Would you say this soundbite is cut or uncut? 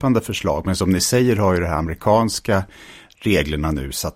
uncut